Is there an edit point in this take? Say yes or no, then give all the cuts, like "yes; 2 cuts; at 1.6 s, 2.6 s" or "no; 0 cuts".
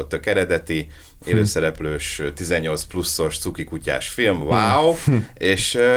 no; 0 cuts